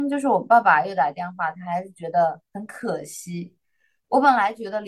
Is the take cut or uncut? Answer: uncut